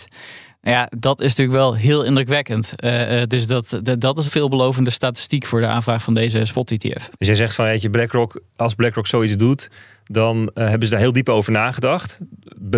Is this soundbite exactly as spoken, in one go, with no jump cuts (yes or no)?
no